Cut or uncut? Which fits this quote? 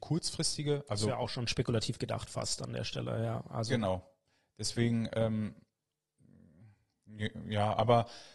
uncut